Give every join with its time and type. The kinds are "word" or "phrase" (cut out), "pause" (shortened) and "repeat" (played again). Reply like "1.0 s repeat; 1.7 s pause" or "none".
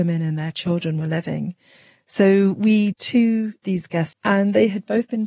2.9 s word; 3.6 s word; 4.1 s word